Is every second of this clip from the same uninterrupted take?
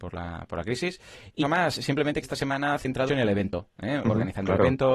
no; 3 cuts; at 1.4 s, 2.2 s, 3.1 s

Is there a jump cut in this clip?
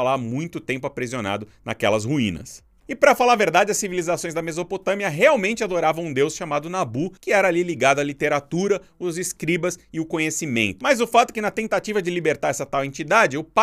no; 0 cuts

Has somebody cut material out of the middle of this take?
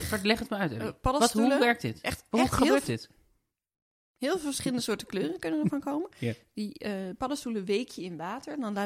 no; 0 cuts

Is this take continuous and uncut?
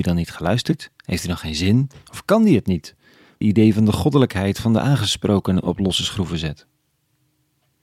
no; 1 cut; at 3.4 s

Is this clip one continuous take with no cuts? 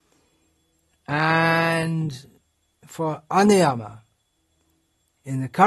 yes; 0 cuts

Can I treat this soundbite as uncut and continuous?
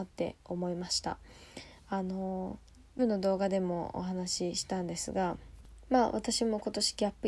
no; 2 cuts; at 3.0 s, 5.8 s

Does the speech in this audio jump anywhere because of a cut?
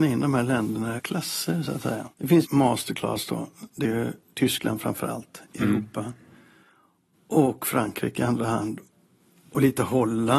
yes; 4 cuts; at 1.0 s, 2.1 s, 2.4 s, 3.8 s

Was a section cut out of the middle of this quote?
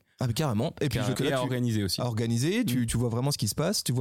yes; 2 cuts; at 1.1 s, 2.9 s

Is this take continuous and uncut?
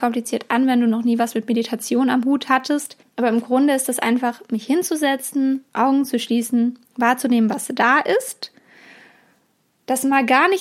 no; 3 cuts; at 3.0 s, 5.7 s, 6.8 s

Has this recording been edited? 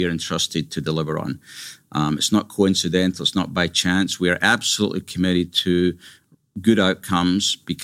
no; 0 cuts

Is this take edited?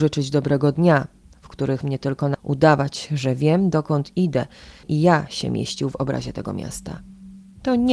yes; 3 cuts; at 1.8 s, 2.3 s, 4.8 s

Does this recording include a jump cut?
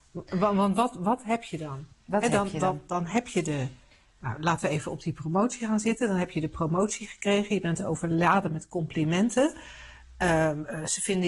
no; 0 cuts

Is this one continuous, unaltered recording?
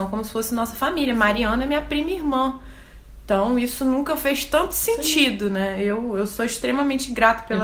yes; 0 cuts

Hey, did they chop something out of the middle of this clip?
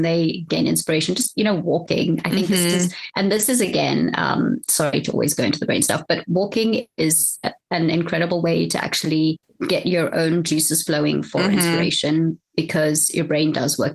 no; 0 cuts

